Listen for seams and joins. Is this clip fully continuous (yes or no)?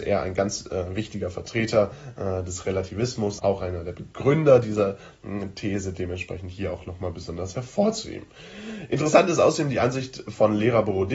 no